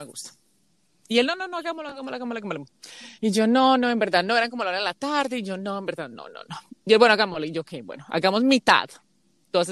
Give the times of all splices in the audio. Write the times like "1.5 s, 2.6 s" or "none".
3.1 s

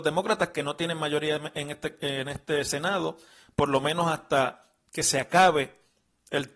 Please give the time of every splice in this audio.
none

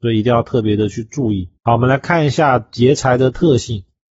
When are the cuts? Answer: 1.6 s

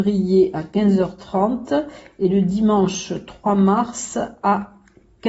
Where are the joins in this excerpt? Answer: none

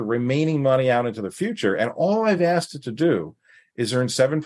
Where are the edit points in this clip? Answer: none

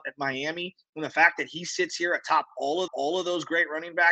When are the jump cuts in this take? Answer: 2.9 s

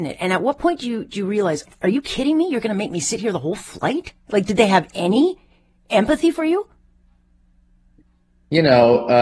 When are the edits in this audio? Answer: none

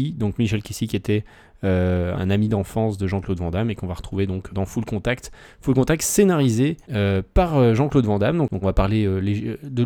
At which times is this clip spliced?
2.1 s, 4.5 s, 6.8 s, 8.6 s

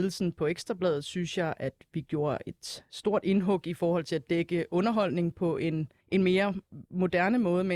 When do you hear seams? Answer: 6.0 s

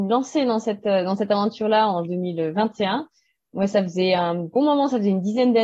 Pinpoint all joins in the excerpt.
2.0 s, 4.6 s

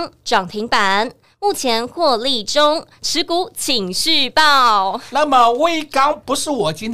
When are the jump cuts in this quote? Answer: none

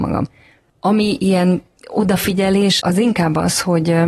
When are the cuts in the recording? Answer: 2.8 s

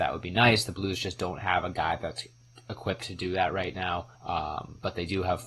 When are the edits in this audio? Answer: 4.1 s

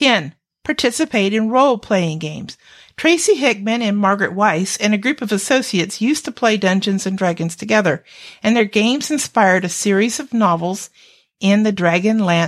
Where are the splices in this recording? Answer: none

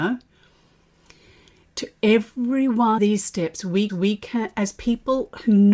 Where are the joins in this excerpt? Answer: 3.0 s, 3.9 s

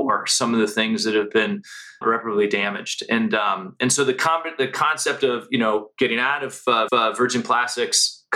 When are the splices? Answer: 2.0 s, 6.9 s

